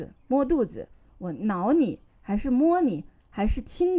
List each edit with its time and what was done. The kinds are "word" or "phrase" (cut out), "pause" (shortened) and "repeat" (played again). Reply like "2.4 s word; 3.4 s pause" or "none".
none